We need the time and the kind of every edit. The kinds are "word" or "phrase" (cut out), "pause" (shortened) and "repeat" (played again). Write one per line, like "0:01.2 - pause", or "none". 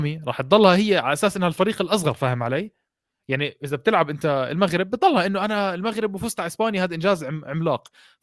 none